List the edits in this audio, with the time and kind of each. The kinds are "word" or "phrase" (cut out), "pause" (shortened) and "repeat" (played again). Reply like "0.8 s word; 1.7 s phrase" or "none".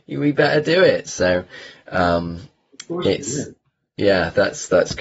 none